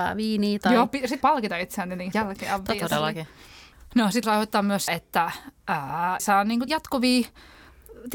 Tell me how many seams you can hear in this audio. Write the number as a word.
six